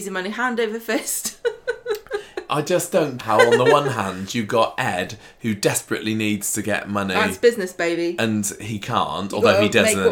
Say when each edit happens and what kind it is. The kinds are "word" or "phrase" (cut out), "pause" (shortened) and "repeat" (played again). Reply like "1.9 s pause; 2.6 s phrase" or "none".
2.5 s word; 3.2 s word